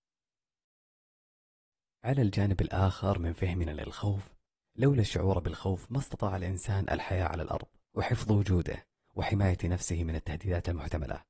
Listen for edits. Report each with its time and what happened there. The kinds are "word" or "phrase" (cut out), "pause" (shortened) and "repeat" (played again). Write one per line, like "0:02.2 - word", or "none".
none